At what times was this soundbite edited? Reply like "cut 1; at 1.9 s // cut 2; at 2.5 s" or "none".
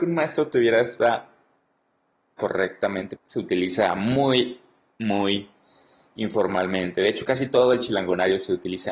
cut 1; at 2.4 s // cut 2; at 3.2 s